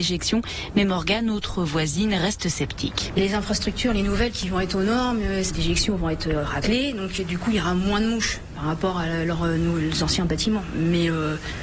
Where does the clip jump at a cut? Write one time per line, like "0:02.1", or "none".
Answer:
none